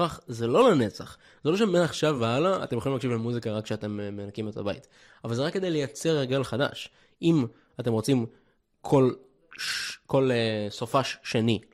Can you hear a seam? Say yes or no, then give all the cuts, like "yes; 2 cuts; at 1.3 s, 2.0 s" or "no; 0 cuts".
no; 0 cuts